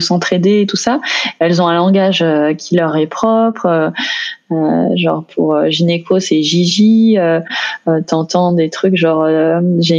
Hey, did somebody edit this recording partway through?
no; 0 cuts

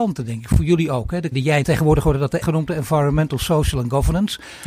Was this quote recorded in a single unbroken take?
no; 3 cuts; at 1.3 s, 1.6 s, 2.4 s

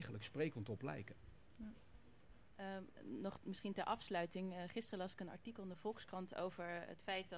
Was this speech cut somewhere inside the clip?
no; 0 cuts

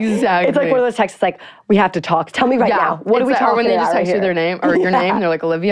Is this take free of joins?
no; 1 cut; at 2.3 s

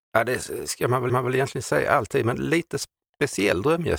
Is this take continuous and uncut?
no; 1 cut; at 1.1 s

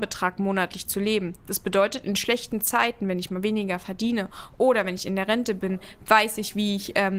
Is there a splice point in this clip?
no; 0 cuts

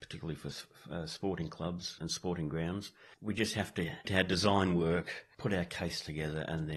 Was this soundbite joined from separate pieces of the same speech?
yes; 2 cuts; at 2.0 s, 4.0 s

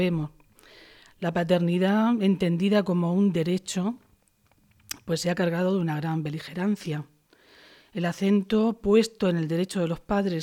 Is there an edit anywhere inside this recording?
no; 0 cuts

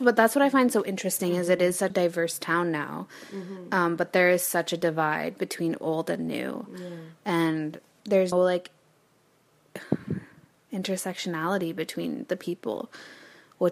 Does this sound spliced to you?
yes; 3 cuts; at 1.9 s, 8.0 s, 8.3 s

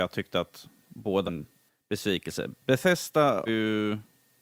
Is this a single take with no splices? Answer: no; 2 cuts; at 1.3 s, 3.5 s

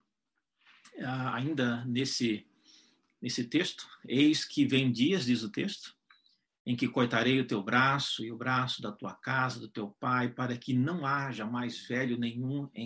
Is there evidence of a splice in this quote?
no; 0 cuts

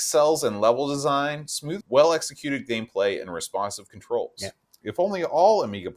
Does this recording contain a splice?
yes; 1 cut; at 1.8 s

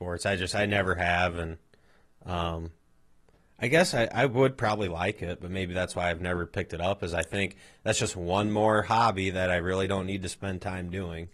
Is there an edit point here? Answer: no; 0 cuts

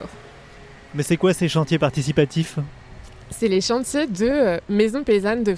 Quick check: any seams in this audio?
no; 0 cuts

